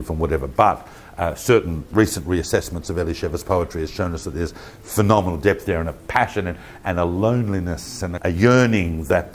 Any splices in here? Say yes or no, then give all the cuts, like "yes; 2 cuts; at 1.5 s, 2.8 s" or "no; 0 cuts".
no; 0 cuts